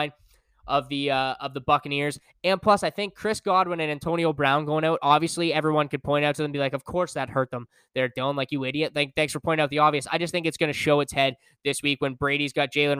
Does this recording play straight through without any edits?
yes; 0 cuts

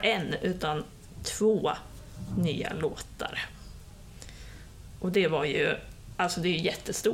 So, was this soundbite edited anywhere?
no; 0 cuts

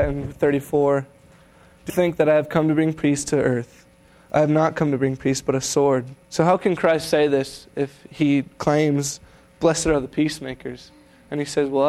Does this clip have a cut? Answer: yes; 2 cuts; at 1.9 s, 6.2 s

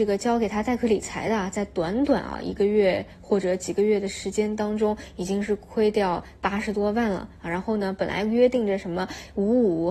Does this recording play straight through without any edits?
yes; 0 cuts

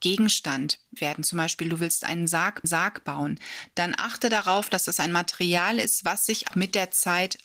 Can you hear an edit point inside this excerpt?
yes; 3 cuts; at 1.0 s, 2.6 s, 6.5 s

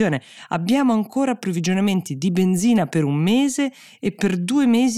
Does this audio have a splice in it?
no; 0 cuts

